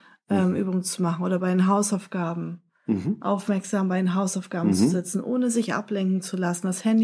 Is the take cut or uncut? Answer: uncut